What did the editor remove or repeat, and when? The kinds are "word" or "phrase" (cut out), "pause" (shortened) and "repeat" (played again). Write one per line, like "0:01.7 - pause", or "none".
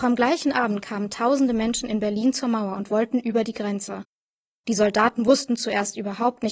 none